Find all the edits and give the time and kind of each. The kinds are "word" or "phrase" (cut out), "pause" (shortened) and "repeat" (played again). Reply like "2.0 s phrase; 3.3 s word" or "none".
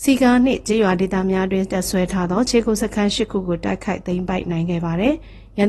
none